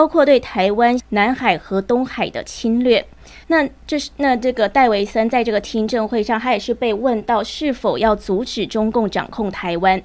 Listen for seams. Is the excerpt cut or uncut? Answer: cut